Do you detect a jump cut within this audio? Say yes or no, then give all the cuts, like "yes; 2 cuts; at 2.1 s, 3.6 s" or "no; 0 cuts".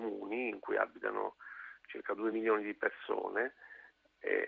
no; 0 cuts